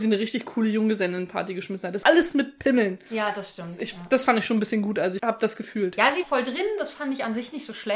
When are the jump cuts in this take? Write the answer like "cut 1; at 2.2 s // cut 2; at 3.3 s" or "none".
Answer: cut 1; at 2.0 s // cut 2; at 5.2 s // cut 3; at 6.2 s

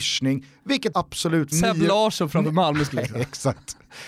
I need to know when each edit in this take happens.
cut 1; at 0.9 s // cut 2; at 1.5 s // cut 3; at 2.9 s

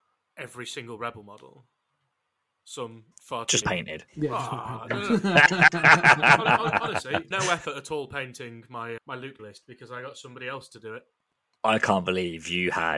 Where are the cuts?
cut 1; at 3.1 s // cut 2; at 3.6 s // cut 3; at 4.1 s // cut 4; at 7.3 s // cut 5; at 9.0 s // cut 6; at 9.4 s

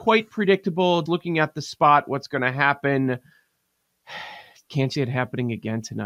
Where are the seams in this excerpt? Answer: cut 1; at 1.1 s // cut 2; at 4.9 s

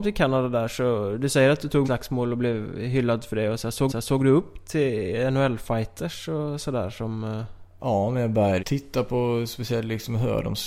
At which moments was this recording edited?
cut 1; at 1.8 s // cut 2; at 3.9 s // cut 3; at 8.6 s

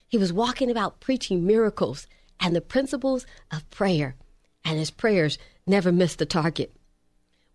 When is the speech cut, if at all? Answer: none

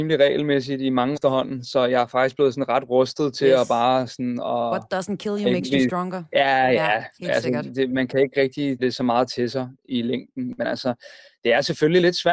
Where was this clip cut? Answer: cut 1; at 1.1 s // cut 2; at 8.8 s

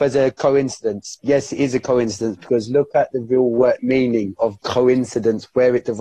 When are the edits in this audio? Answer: cut 1; at 1.2 s // cut 2; at 3.8 s // cut 3; at 4.6 s

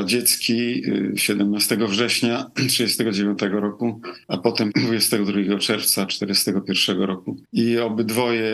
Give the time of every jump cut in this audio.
cut 1; at 4.2 s // cut 2; at 4.7 s // cut 3; at 7.4 s

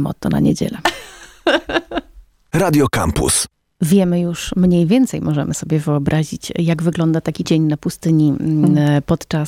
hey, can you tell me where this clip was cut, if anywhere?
cut 1; at 7.4 s

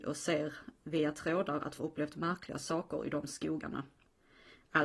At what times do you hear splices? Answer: cut 1; at 1.8 s

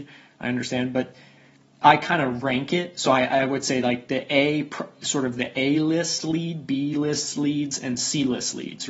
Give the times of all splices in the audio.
none

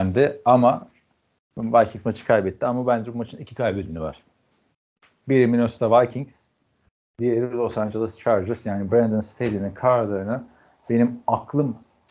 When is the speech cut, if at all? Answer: none

